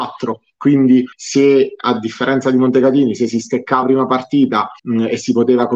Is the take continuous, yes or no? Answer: no